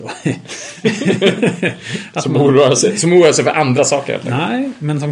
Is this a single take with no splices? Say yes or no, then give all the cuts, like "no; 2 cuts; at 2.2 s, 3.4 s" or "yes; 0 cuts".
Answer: yes; 0 cuts